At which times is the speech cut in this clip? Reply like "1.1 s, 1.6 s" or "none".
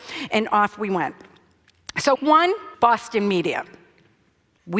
2.1 s, 2.7 s